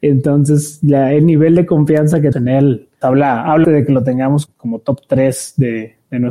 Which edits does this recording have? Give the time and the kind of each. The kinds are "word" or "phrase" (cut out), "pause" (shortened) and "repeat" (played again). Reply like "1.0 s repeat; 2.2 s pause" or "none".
2.3 s word; 3.0 s word; 3.6 s word; 4.5 s word